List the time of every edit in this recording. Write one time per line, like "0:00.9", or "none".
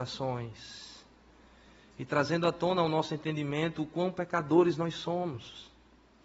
none